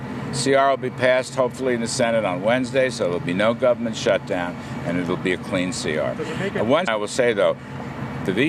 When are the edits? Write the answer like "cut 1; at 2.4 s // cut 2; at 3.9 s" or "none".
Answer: cut 1; at 6.9 s